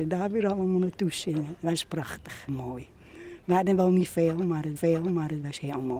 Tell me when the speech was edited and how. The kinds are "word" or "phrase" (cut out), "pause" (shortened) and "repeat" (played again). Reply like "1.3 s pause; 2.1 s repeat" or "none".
2.5 s word; 4.8 s repeat